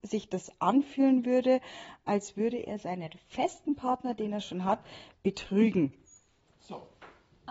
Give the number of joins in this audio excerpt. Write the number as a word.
zero